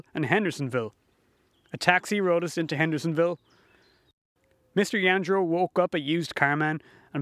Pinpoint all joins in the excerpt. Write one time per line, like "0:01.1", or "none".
none